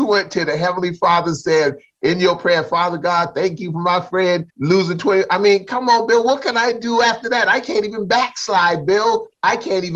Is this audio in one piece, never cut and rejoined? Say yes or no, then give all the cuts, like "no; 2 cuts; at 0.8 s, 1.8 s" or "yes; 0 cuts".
no; 1 cut; at 4.5 s